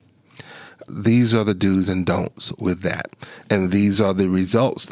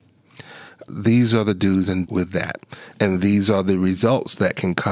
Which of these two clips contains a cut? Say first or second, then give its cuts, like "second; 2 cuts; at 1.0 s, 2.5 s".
second; 1 cut; at 2.1 s